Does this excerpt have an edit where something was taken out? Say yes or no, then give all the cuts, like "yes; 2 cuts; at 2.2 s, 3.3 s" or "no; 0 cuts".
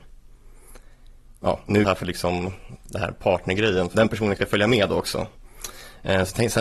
yes; 3 cuts; at 1.8 s, 3.9 s, 4.4 s